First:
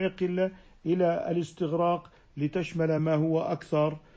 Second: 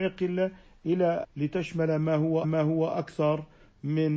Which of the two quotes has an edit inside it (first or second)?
second